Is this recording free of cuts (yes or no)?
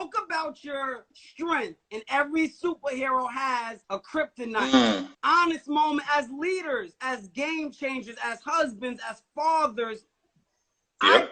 no